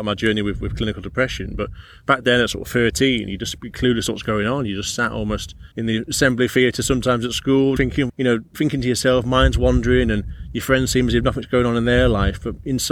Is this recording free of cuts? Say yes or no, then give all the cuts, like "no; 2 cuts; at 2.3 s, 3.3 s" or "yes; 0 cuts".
no; 4 cuts; at 3.6 s, 5.7 s, 7.8 s, 8.1 s